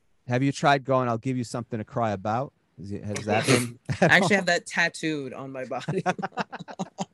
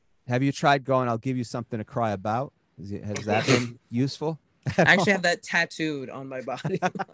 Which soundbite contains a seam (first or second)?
first